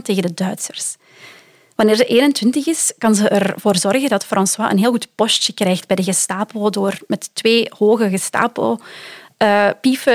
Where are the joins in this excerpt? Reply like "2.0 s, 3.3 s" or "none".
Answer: none